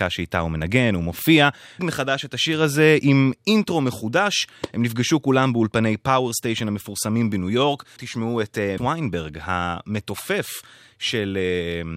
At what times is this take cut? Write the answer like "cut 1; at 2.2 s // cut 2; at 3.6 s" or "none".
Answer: cut 1; at 1.8 s // cut 2; at 8.0 s // cut 3; at 8.8 s